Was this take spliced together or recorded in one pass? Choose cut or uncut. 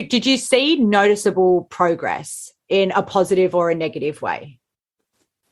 uncut